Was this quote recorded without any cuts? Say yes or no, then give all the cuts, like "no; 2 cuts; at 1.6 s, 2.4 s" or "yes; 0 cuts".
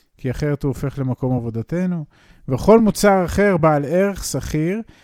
yes; 0 cuts